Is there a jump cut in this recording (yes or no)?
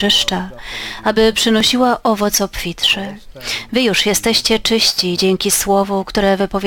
no